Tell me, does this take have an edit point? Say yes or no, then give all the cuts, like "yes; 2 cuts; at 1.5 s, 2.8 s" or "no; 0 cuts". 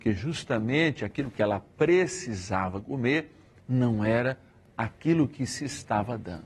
no; 0 cuts